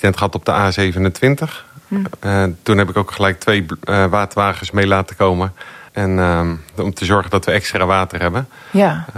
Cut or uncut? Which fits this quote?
cut